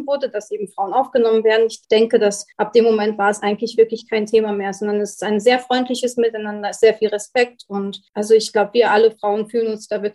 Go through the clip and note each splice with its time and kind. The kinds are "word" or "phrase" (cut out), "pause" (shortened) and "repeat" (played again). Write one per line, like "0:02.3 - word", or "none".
0:08.1 - pause